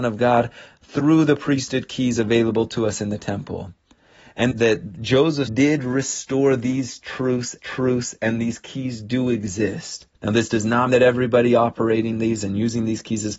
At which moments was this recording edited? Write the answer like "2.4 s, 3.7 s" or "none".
4.5 s, 5.5 s, 7.6 s, 10.1 s, 10.9 s, 12.1 s